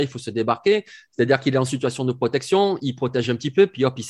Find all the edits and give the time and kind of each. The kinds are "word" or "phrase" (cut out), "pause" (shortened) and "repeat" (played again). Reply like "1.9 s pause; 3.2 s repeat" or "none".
none